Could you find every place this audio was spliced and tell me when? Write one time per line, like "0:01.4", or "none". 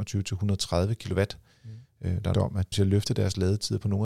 0:02.3
0:02.7

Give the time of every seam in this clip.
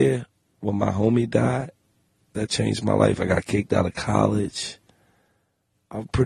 none

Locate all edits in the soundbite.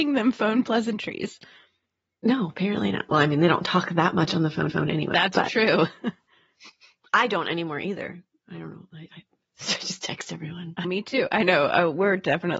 0:04.7
0:09.1
0:10.8

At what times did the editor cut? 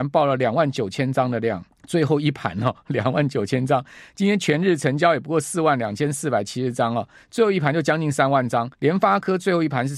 0:01.7
0:08.7

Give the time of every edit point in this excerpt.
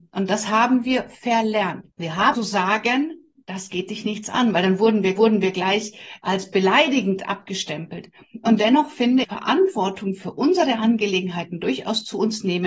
0:01.9
0:02.3
0:05.2
0:09.2

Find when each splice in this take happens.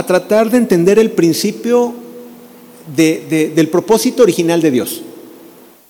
none

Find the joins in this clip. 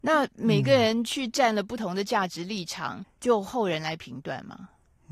0:03.0

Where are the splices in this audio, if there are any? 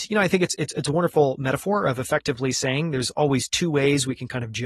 none

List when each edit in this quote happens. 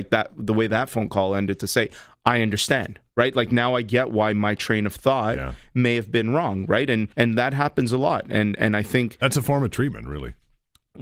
0:03.1
0:07.1

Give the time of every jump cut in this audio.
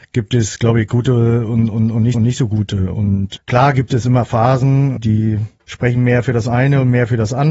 0:02.1

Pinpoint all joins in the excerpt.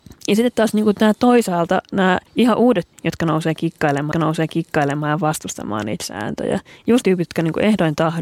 0:02.3
0:02.9
0:04.1
0:07.0

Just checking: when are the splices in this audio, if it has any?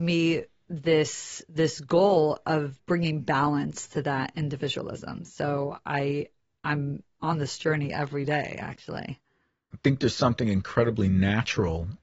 none

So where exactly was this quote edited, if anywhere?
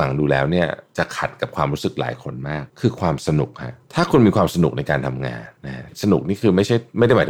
0:02.7
0:03.8
0:05.6

